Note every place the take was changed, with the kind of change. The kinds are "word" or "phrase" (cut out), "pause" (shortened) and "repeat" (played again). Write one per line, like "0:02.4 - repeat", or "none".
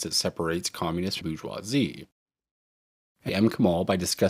0:01.2 - phrase
0:03.3 - word